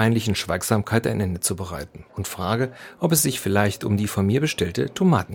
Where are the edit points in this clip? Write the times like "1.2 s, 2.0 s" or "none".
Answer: 2.1 s